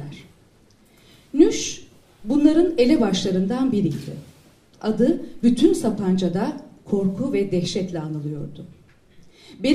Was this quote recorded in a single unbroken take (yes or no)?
yes